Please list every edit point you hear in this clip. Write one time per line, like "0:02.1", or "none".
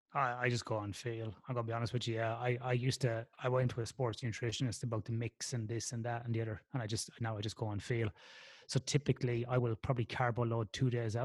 0:03.3